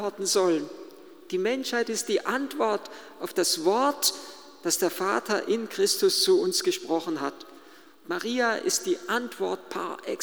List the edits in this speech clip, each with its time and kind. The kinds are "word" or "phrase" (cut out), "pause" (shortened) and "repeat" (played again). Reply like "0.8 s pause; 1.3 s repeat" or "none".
none

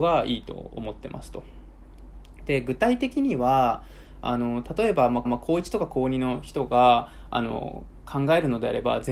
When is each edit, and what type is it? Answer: 5.2 s repeat

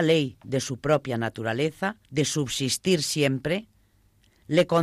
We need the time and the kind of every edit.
2.0 s pause

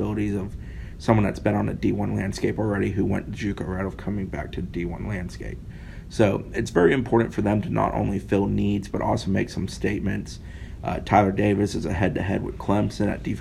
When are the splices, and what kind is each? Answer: none

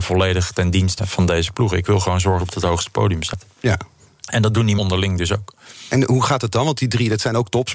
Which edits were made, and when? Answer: 1.0 s word; 2.4 s phrase; 4.8 s word

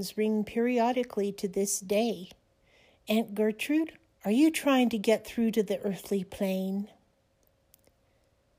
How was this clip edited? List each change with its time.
none

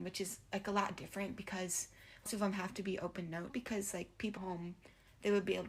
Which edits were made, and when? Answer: 2.3 s word; 3.5 s word; 4.4 s word

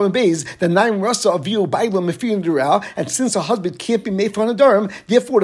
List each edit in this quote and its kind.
none

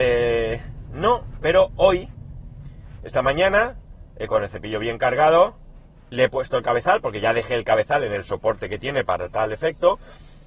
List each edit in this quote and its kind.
none

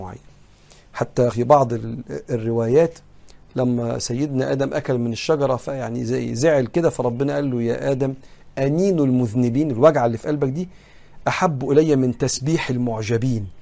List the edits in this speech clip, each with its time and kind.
1.3 s word

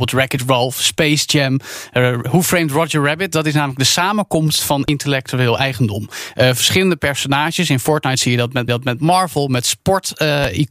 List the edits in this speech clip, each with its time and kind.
8.7 s repeat

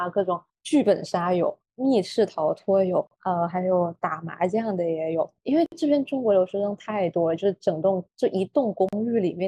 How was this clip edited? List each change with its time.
3.1 s pause; 8.1 s pause

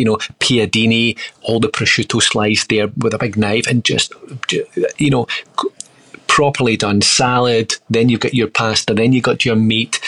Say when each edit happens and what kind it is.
none

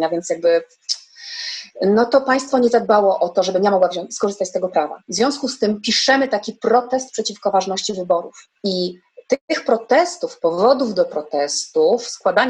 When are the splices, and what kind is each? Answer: 8.6 s pause

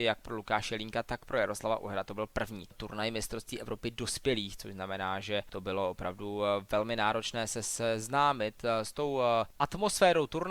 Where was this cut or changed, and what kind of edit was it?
none

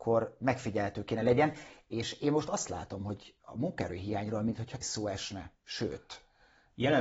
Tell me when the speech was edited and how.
3.4 s pause; 4.8 s word

